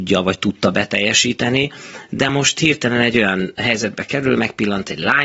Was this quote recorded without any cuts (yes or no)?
yes